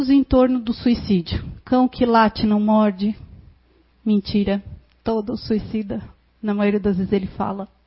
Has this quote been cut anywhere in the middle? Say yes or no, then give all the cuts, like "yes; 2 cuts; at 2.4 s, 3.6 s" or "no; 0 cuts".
no; 0 cuts